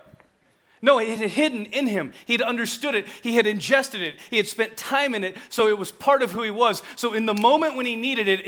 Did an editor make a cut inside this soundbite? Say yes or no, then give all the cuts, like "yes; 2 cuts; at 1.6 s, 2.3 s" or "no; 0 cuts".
no; 0 cuts